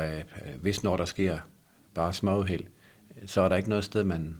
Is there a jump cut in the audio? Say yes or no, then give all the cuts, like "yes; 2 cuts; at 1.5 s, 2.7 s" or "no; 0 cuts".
no; 0 cuts